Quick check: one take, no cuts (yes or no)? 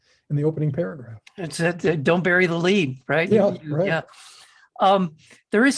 yes